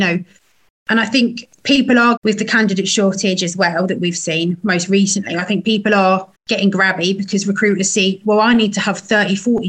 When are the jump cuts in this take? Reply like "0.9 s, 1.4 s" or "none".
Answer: 2.2 s, 6.3 s